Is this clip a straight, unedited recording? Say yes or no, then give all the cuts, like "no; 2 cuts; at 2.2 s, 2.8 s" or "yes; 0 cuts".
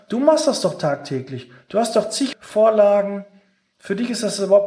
no; 1 cut; at 2.3 s